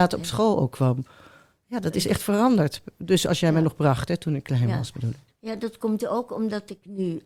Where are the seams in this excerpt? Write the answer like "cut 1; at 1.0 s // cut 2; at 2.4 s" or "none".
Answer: none